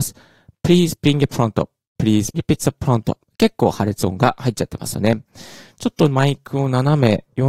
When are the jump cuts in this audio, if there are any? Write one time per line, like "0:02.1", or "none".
0:01.3
0:02.3